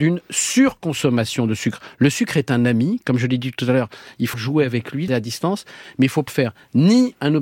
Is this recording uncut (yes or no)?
no